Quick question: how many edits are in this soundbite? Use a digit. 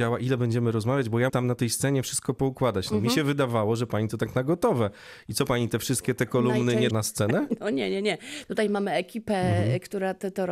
2